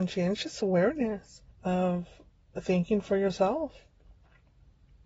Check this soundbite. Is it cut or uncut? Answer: cut